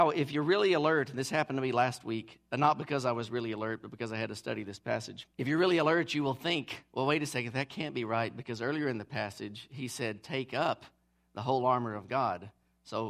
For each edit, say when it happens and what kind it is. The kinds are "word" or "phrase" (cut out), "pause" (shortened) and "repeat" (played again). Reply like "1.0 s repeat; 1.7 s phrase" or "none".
5.3 s pause